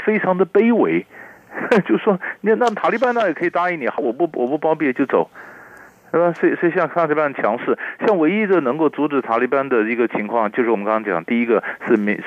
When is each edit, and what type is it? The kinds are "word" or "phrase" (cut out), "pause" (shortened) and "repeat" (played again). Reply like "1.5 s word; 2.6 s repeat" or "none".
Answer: 4.0 s word